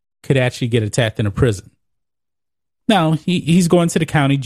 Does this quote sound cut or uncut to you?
uncut